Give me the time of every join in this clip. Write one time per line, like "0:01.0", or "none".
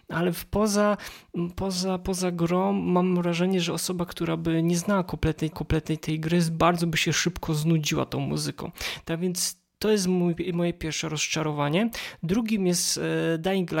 0:05.5